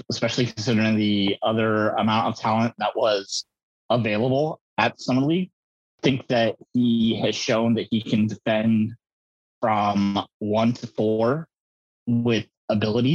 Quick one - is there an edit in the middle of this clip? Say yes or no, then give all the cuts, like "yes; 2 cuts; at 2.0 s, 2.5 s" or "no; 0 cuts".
no; 0 cuts